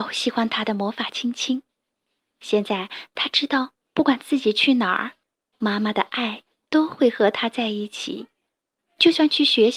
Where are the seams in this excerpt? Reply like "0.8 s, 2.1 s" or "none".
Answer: none